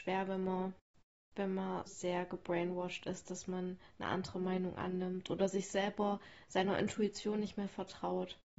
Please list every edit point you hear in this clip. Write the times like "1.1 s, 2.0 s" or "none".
1.9 s